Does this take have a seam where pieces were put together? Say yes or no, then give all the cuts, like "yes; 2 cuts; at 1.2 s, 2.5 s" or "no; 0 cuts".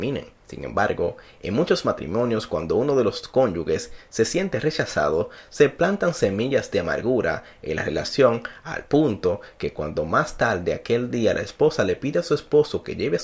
no; 0 cuts